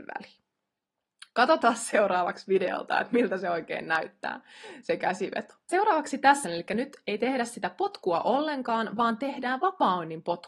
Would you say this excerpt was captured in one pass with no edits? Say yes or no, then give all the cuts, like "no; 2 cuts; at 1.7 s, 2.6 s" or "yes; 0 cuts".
no; 1 cut; at 6.4 s